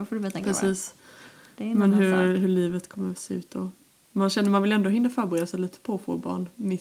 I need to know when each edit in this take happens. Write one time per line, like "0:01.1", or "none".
none